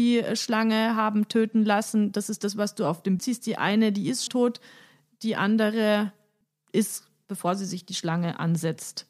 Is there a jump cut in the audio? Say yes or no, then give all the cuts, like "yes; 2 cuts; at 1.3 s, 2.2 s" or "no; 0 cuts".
yes; 3 cuts; at 3.2 s, 4.3 s, 7.2 s